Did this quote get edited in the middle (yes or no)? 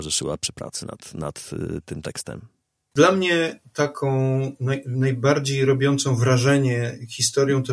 no